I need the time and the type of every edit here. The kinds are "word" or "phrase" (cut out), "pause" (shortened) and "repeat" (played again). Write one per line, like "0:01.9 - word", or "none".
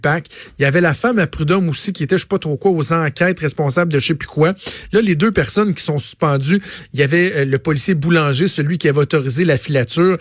none